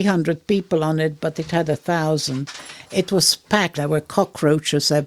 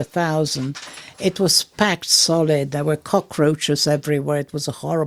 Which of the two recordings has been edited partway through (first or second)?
first